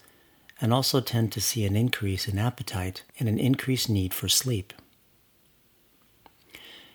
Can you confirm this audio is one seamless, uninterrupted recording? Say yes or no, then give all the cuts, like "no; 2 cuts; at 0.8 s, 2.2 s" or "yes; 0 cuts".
no; 1 cut; at 3.1 s